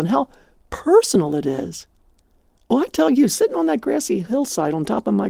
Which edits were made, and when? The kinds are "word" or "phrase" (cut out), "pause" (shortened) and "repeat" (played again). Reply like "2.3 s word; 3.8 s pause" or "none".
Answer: none